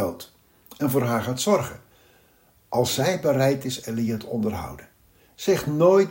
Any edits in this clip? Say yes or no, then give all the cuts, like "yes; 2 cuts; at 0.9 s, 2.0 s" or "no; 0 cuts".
no; 0 cuts